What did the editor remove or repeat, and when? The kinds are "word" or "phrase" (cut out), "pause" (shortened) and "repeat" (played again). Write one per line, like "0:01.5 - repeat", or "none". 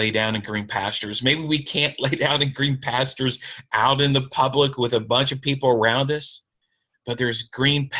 none

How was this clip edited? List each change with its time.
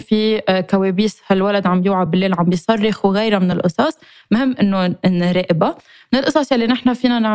none

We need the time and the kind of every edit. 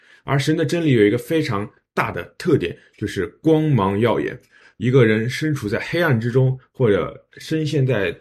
none

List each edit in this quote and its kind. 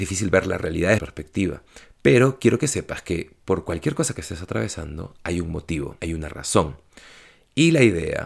0:01.0 - word
0:06.0 - word

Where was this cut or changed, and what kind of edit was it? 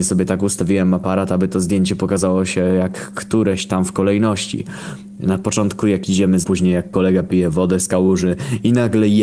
0:06.4 - phrase

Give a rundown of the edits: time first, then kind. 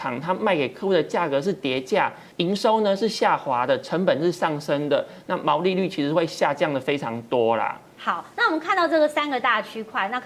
0:02.3 - pause

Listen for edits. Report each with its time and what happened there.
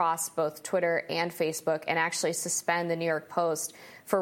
none

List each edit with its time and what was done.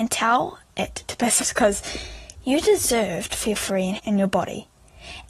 0:01.4 - word
0:04.0 - word

